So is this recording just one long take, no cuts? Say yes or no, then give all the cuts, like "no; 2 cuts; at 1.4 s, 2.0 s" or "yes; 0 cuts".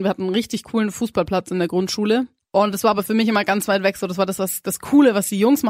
yes; 0 cuts